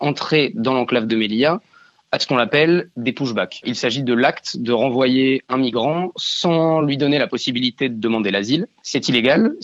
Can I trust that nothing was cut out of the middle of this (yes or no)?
yes